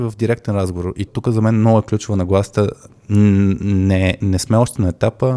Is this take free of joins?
no; 1 cut; at 1.1 s

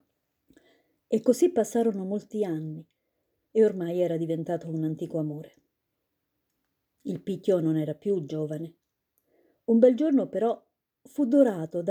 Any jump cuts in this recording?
no; 0 cuts

